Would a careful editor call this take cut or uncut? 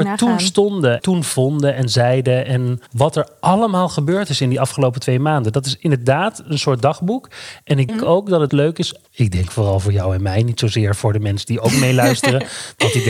cut